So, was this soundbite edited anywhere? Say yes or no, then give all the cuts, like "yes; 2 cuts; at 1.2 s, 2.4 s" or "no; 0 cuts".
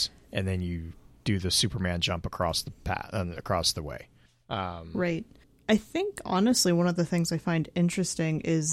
no; 0 cuts